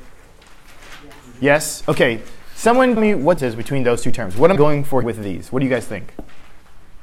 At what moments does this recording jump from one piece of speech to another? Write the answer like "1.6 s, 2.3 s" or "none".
3.0 s, 3.4 s, 4.6 s, 5.0 s

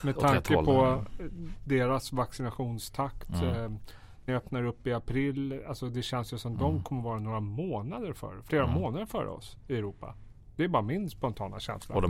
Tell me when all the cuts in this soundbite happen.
4.3 s

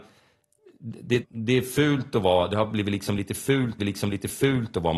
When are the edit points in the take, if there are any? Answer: 1.2 s, 3.8 s

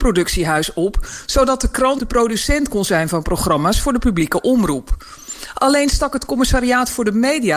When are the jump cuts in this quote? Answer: 2.0 s

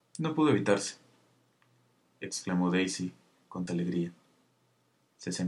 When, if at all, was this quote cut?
3.7 s

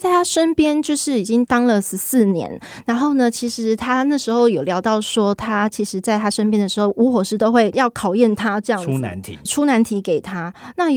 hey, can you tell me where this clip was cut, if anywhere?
9.5 s

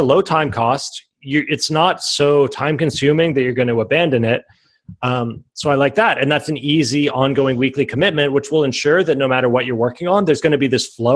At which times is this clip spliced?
none

